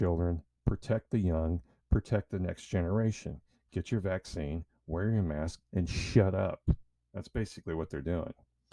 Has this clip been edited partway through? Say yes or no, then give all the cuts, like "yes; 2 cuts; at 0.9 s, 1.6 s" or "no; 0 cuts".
no; 0 cuts